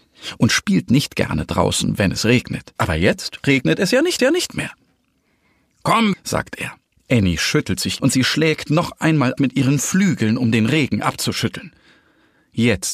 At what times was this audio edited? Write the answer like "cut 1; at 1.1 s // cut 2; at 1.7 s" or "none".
cut 1; at 2.8 s // cut 2; at 4.2 s // cut 3; at 6.1 s // cut 4; at 6.9 s // cut 5; at 8.0 s // cut 6; at 9.4 s